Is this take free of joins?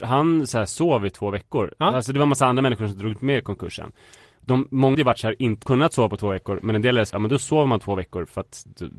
no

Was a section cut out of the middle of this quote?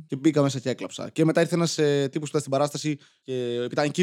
no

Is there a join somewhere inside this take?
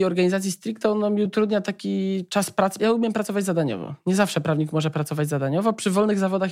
no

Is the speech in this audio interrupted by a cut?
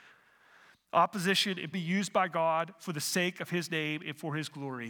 yes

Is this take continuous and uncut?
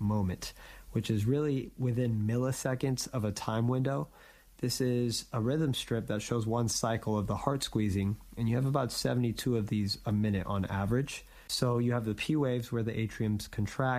yes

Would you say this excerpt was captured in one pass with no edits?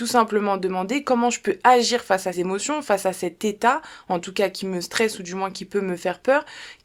no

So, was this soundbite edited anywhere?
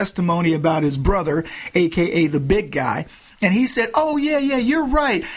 no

